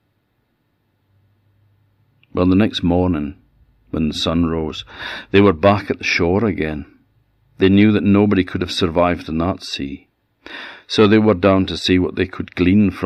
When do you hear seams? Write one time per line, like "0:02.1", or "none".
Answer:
none